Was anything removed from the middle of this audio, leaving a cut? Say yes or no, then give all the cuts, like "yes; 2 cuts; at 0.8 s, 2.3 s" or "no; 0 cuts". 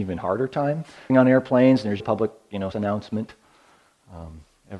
yes; 3 cuts; at 1.1 s, 2.0 s, 2.7 s